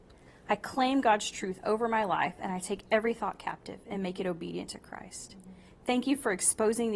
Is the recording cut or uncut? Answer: uncut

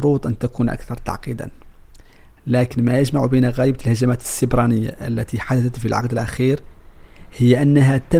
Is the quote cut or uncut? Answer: uncut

